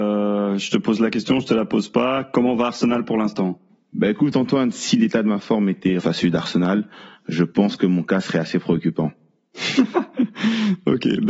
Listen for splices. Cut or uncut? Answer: cut